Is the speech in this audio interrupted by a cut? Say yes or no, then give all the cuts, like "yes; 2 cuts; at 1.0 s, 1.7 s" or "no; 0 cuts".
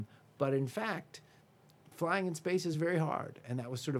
no; 0 cuts